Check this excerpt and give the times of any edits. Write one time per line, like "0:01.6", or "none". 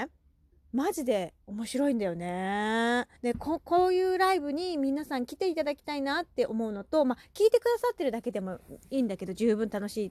0:03.2